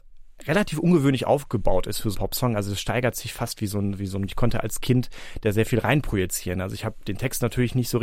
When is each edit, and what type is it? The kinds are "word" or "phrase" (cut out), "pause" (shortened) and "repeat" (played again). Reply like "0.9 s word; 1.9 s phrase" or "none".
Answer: 2.1 s word; 4.3 s phrase